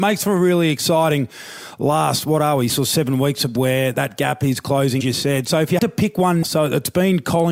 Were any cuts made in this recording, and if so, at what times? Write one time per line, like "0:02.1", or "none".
0:02.7
0:03.6
0:03.9
0:05.0
0:05.8
0:06.4